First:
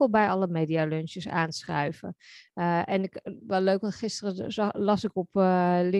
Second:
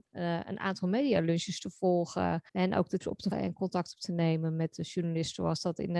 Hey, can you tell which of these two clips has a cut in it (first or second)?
second